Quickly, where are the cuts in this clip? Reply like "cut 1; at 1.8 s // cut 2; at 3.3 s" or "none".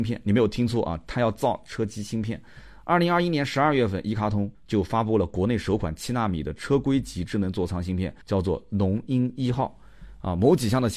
cut 1; at 4.5 s // cut 2; at 8.2 s